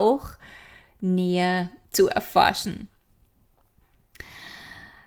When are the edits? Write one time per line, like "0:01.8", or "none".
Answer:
0:01.8